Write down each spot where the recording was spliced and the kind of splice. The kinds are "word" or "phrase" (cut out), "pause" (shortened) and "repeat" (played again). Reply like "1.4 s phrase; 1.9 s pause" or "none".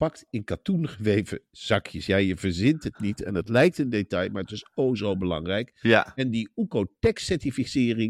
none